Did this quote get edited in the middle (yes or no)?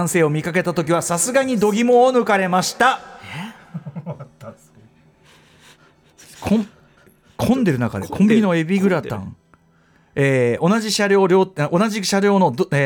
no